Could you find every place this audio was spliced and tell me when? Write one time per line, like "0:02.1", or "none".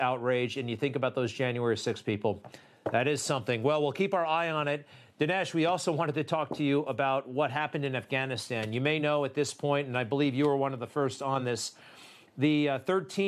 none